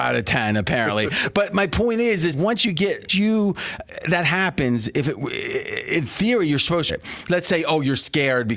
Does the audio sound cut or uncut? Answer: cut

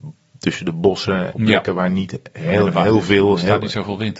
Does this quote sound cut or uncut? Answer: cut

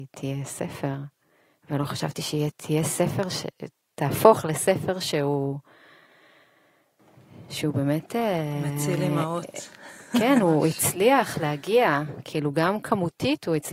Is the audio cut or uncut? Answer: uncut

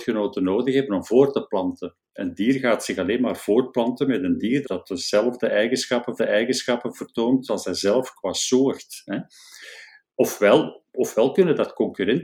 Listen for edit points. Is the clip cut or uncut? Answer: cut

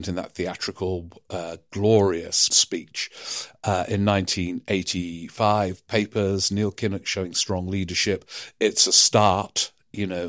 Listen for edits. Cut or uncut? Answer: cut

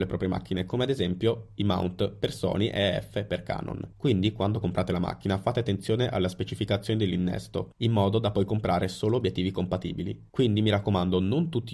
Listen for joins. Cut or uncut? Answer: uncut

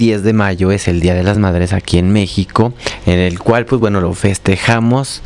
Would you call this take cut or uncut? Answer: uncut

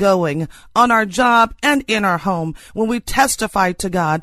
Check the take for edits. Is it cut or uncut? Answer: uncut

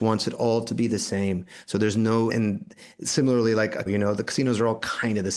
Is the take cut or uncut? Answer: cut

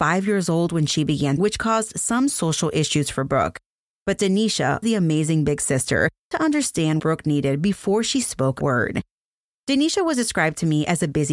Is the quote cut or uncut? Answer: cut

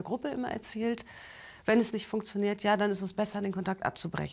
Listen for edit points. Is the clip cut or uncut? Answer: uncut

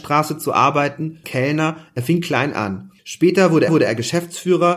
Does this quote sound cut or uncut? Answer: cut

